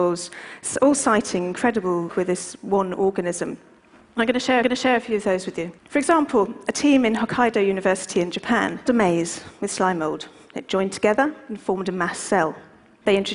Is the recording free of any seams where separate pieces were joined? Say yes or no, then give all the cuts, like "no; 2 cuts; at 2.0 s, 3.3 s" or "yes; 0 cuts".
no; 4 cuts; at 2.1 s, 4.6 s, 5.8 s, 8.9 s